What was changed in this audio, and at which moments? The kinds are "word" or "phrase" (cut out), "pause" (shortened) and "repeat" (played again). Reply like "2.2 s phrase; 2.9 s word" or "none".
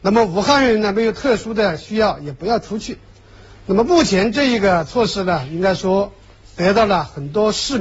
none